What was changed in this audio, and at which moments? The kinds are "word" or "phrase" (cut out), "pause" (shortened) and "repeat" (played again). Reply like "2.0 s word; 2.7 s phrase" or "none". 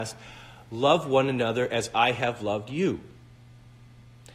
none